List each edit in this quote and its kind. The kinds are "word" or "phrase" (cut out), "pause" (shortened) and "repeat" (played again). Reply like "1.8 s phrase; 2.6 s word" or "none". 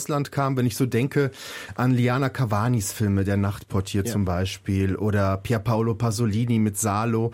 none

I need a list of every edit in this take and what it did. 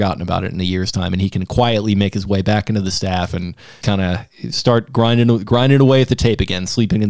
3.8 s word

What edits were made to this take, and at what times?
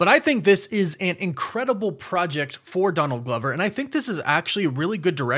none

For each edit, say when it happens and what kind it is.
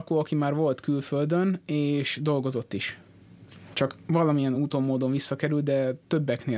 none

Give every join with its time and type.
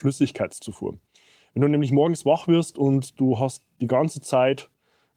none

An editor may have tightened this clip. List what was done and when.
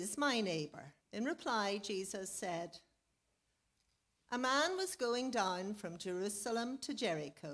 1.0 s pause

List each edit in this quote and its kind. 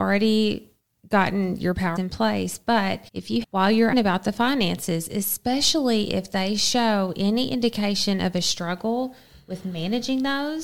2.0 s phrase; 3.1 s pause; 3.4 s word; 3.9 s word

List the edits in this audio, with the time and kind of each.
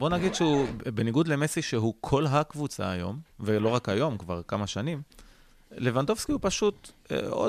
none

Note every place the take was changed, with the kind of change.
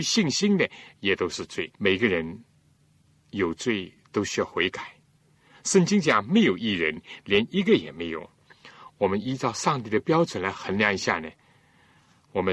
1.8 s pause

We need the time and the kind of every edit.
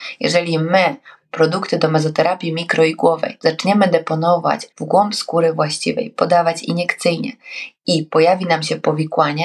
3.4 s pause; 4.7 s pause

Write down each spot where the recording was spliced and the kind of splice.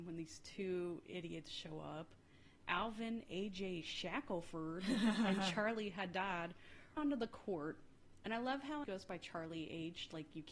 7.0 s word; 8.8 s phrase

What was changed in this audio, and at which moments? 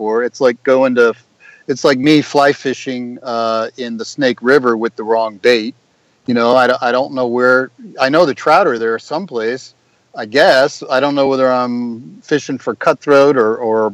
none

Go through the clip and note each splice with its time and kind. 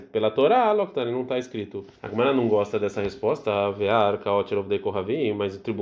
2.0 s pause

